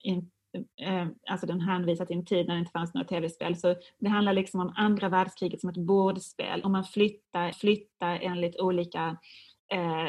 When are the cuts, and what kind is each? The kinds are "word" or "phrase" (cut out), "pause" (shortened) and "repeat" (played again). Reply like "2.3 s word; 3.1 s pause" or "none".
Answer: 6.6 s phrase; 7.5 s repeat